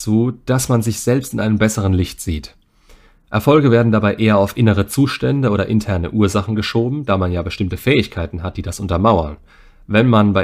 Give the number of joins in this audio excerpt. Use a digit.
0